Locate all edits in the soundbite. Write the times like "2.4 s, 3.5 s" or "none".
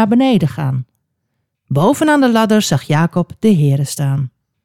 none